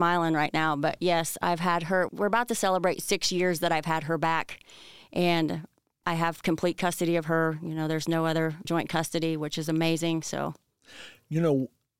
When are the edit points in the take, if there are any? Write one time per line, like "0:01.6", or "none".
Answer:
0:02.1
0:06.0
0:08.6